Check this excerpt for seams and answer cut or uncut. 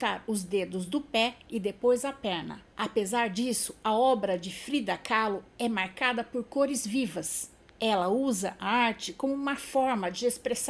uncut